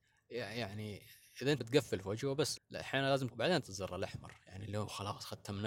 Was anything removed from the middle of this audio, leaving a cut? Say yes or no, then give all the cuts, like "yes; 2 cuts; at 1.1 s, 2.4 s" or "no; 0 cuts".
yes; 4 cuts; at 1.6 s, 2.6 s, 3.3 s, 3.6 s